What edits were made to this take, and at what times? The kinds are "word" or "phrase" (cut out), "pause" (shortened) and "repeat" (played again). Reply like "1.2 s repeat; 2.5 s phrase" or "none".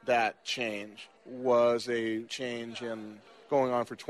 1.2 s pause; 2.3 s word